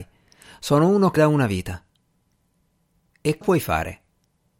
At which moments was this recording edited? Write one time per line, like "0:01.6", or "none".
0:01.2
0:03.4